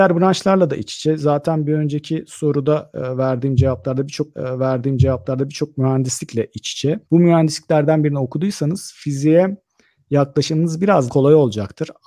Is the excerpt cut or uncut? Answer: cut